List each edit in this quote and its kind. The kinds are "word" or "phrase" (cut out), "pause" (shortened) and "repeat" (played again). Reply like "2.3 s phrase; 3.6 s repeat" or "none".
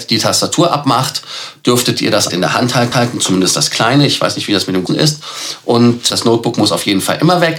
2.3 s word; 2.9 s repeat; 4.9 s word; 6.1 s word